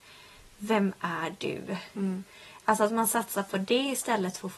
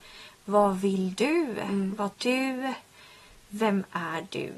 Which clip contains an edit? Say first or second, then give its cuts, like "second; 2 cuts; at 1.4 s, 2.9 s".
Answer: second; 1 cut; at 2.1 s